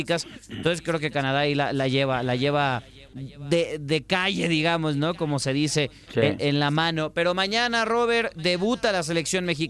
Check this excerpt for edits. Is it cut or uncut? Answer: cut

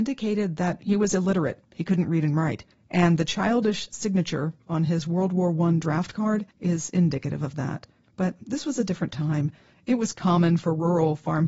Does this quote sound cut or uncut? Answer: cut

